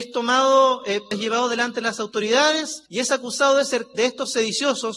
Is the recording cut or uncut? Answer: cut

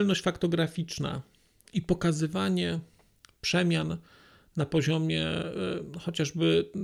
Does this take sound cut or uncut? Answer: uncut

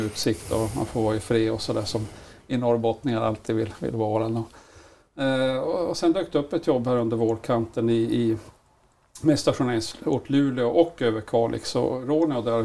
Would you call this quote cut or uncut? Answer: uncut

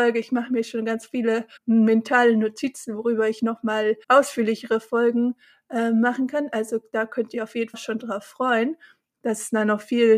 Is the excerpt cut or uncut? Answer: cut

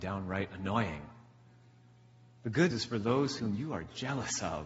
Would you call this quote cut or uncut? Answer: cut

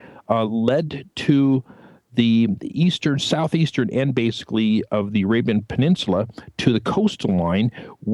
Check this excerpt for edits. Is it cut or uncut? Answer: uncut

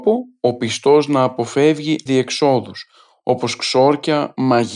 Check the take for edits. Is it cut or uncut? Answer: cut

